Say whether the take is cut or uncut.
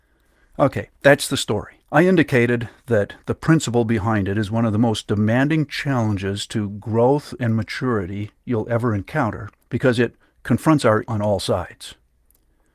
cut